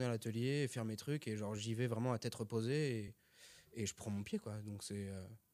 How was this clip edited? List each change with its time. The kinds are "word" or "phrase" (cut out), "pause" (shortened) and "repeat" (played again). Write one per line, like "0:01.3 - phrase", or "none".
none